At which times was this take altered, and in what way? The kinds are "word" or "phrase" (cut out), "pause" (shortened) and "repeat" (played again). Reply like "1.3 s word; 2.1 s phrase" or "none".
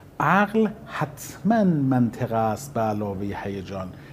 none